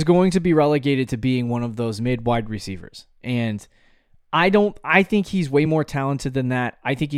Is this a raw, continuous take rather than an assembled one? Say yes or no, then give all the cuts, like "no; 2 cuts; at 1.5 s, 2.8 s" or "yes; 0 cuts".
yes; 0 cuts